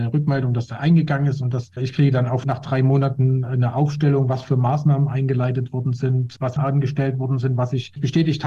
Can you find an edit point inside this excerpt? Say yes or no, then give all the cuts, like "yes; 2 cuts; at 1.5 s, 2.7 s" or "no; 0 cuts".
yes; 2 cuts; at 2.4 s, 6.6 s